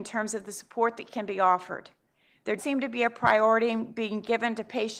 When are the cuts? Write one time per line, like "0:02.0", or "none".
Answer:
0:02.6

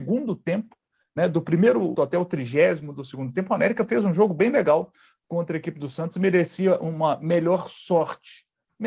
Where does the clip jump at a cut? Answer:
0:01.9

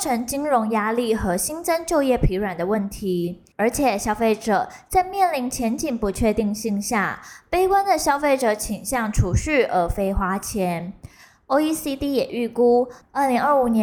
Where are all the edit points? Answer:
none

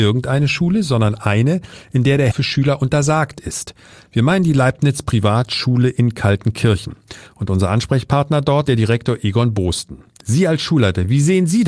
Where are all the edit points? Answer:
0:02.3
0:08.6

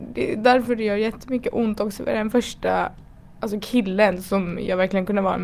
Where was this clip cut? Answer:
none

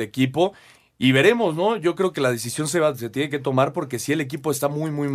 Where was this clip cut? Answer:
none

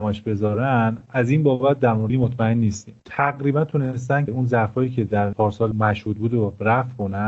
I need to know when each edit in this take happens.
0:02.1
0:03.0
0:04.3
0:05.7

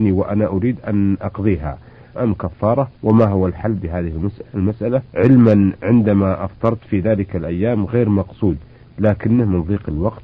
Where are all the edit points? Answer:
0:02.1
0:03.0
0:05.1

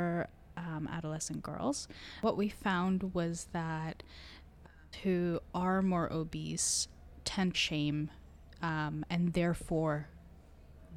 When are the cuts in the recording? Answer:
0:04.9
0:07.5

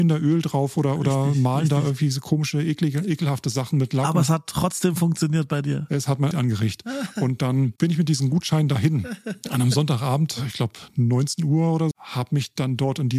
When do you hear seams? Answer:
0:06.3
0:11.9

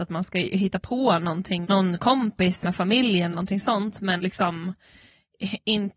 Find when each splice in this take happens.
0:01.6
0:02.6
0:03.3
0:04.2

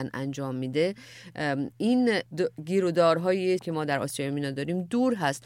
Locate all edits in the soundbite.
0:01.7
0:03.6

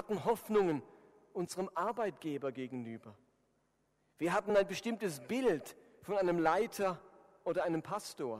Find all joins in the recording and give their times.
none

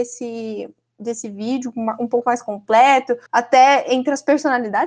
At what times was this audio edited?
0:03.3

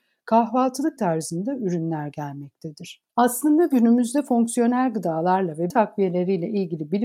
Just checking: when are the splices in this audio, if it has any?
0:01.0
0:03.1
0:05.7

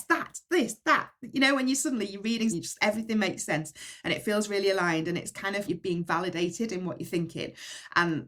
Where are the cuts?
0:02.5
0:05.7

